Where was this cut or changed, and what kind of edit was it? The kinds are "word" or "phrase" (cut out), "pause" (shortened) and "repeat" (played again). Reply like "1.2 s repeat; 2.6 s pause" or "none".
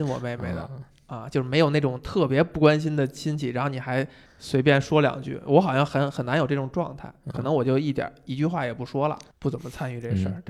4.3 s pause

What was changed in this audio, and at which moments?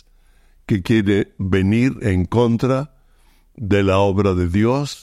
none

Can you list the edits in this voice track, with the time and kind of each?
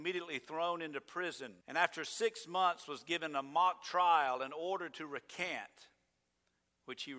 1.6 s pause

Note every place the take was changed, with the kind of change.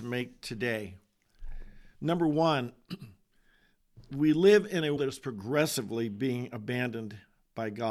5.0 s word

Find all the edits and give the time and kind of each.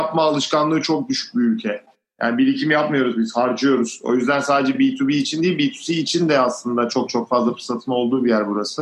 none

